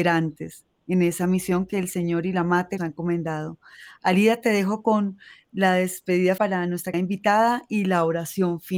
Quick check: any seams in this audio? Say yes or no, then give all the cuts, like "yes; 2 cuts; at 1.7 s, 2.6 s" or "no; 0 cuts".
yes; 3 cuts; at 2.8 s, 6.4 s, 6.9 s